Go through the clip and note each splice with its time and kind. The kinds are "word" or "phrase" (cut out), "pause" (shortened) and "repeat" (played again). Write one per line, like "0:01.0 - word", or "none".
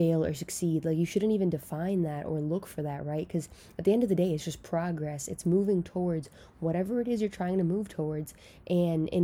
none